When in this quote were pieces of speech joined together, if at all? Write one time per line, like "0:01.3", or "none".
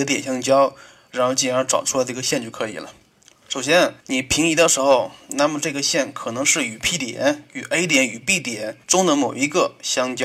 0:04.0
0:08.8